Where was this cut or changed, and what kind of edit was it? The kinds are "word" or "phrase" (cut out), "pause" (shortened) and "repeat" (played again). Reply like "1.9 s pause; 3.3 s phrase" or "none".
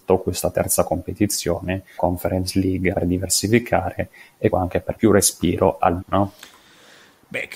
2.0 s word; 2.9 s word; 4.5 s word; 4.9 s word; 6.0 s word